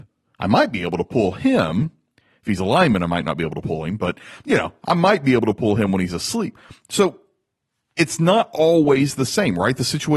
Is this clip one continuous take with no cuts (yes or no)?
yes